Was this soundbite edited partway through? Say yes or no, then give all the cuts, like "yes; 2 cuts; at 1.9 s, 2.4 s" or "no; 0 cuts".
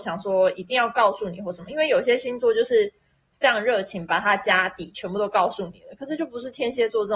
no; 0 cuts